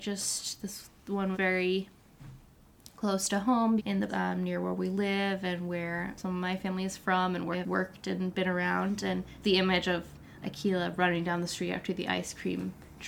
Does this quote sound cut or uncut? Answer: cut